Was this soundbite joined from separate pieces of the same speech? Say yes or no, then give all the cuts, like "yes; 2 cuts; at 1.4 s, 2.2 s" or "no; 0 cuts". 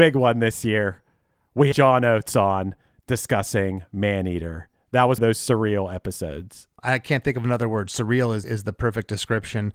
yes; 4 cuts; at 1.7 s, 5.2 s, 6.8 s, 8.4 s